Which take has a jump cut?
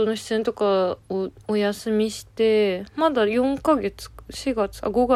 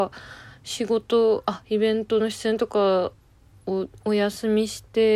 first; 1 cut; at 1.0 s

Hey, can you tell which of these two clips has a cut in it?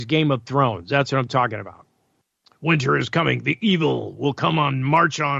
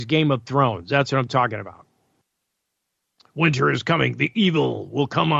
first; 1 cut; at 2.4 s

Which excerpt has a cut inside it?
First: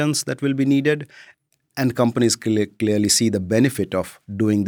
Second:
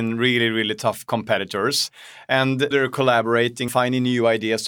second; 2 cuts; at 2.7 s, 3.7 s

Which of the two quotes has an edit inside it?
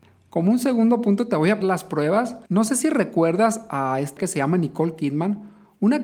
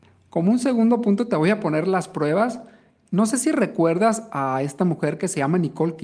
first; 3 cuts; at 1.6 s, 2.5 s, 4.2 s

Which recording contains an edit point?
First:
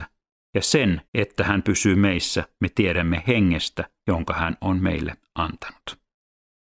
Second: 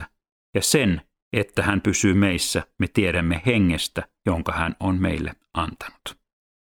first; 1 cut; at 1.1 s

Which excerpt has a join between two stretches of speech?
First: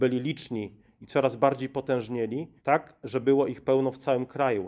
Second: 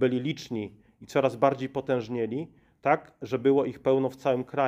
first; 1 cut; at 2.6 s

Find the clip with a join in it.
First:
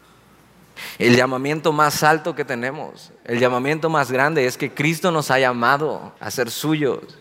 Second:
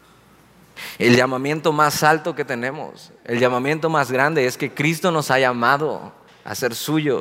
first; 1 cut; at 6.2 s

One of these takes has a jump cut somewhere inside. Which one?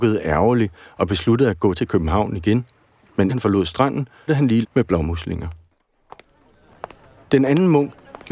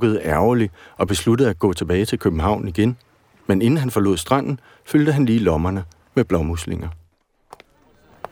first; 4 cuts; at 1.7 s, 3.3 s, 4.3 s, 4.6 s

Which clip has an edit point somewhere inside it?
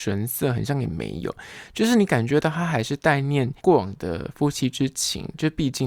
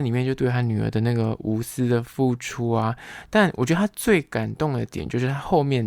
first; 1 cut; at 3.6 s

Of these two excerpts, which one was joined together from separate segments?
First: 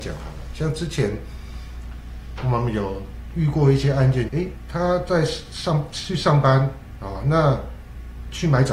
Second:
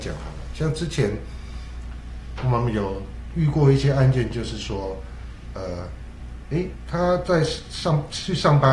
first; 1 cut; at 4.3 s

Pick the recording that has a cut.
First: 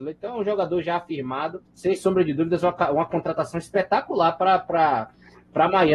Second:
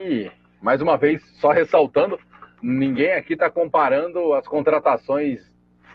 first; 1 cut; at 1.7 s

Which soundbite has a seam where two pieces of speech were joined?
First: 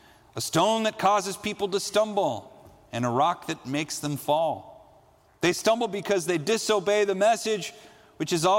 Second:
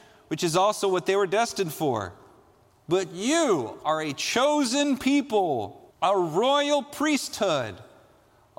second; 1 cut; at 5.9 s

